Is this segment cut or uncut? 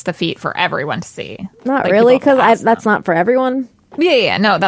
uncut